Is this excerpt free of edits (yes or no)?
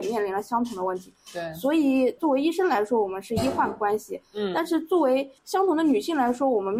no